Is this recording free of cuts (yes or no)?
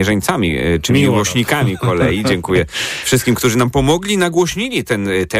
yes